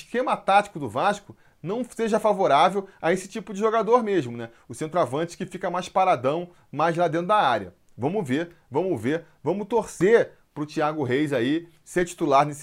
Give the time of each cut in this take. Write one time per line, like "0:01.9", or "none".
none

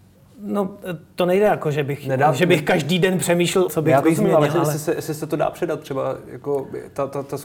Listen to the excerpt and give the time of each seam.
0:03.7
0:04.0

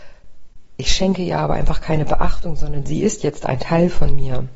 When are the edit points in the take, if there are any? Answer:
none

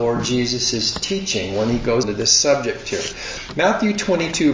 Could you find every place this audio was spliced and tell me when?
0:02.0

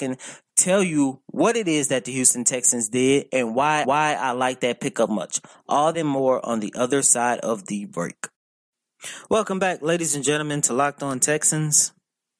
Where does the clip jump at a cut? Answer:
0:03.8
0:05.1
0:05.9

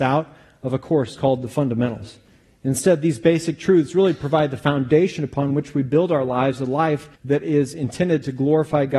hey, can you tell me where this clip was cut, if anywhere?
0:07.1

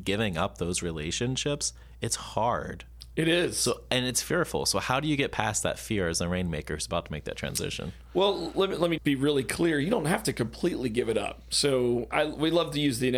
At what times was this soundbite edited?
0:09.0
0:12.1

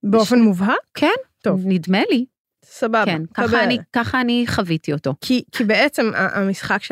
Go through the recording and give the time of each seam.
none

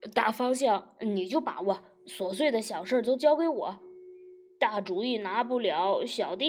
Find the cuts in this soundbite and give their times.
0:04.5

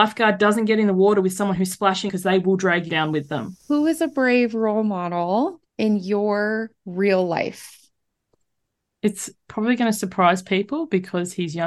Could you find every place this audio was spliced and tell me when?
0:02.1
0:02.9
0:03.6
0:05.7
0:06.8

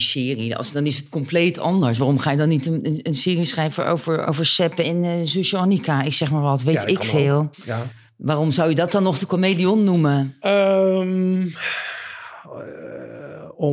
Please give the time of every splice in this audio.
0:07.5

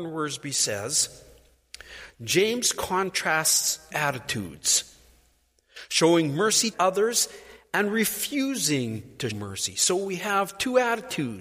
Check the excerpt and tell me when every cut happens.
0:03.9
0:06.7
0:09.3

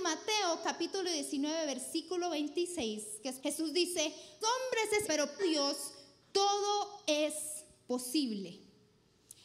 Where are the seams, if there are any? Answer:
0:03.4
0:04.4
0:05.0
0:05.4

